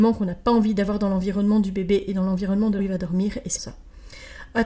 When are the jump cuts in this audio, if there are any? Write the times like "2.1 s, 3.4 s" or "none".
2.8 s, 3.6 s